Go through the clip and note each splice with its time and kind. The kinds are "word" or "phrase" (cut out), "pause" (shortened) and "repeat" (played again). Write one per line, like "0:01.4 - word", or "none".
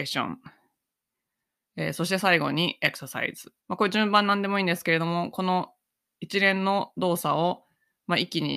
0:03.6 - pause

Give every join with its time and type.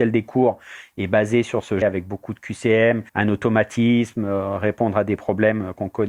0:01.8 - phrase
0:03.1 - pause

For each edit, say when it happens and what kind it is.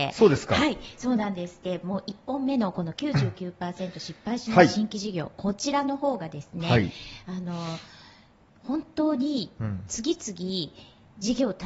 none

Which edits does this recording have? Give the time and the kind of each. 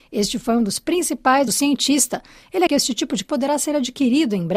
0:01.5 - phrase
0:02.7 - word
0:03.2 - word

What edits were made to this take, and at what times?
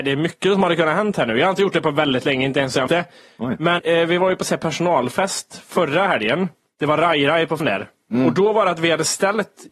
0:02.9 - word
0:03.8 - word
0:07.6 - word

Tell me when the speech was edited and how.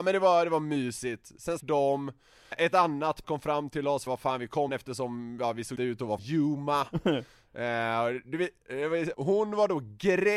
0:01.6 - word
0:02.5 - word
0:03.2 - word
0:04.1 - word
0:04.7 - word
0:05.8 - word
0:06.2 - word
0:09.1 - word

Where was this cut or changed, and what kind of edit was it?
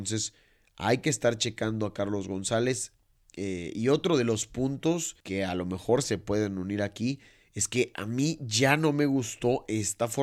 0:05.2 - pause

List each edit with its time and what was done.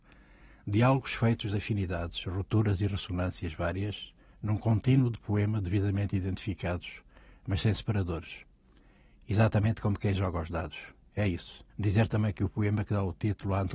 0:04.3 - pause
0:11.7 - pause

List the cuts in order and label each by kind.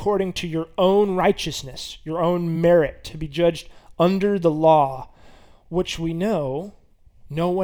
none

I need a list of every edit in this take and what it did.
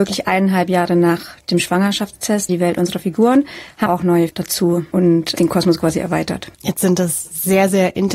0:02.5 - word
0:03.9 - word
0:04.3 - word
0:04.9 - word
0:06.5 - pause

